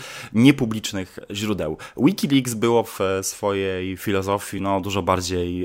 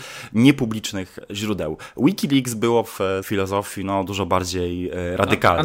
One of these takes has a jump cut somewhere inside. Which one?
second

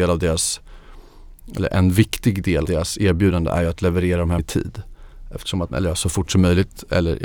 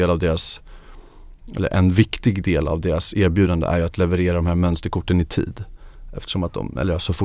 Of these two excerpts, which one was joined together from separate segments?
first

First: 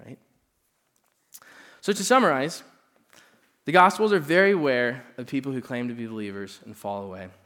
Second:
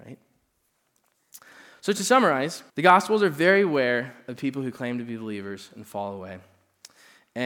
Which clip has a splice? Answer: second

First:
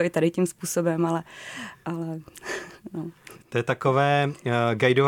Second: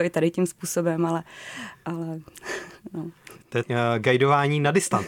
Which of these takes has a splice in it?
second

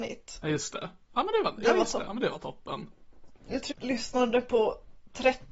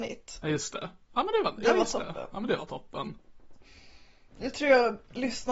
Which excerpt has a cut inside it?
first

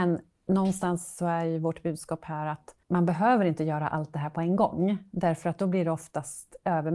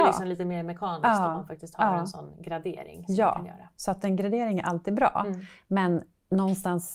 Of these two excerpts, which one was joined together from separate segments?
first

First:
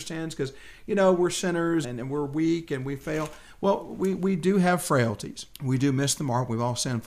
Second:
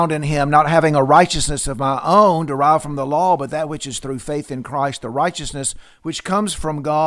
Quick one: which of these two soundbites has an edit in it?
first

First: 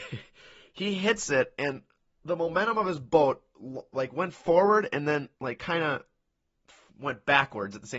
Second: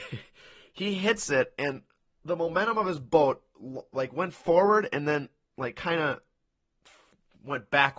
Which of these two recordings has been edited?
first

